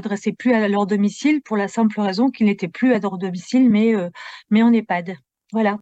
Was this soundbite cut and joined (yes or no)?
no